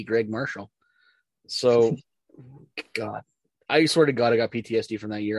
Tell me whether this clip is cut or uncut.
uncut